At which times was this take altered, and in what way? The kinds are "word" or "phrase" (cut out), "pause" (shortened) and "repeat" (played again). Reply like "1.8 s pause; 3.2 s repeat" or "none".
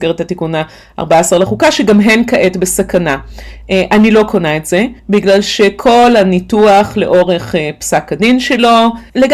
5.0 s pause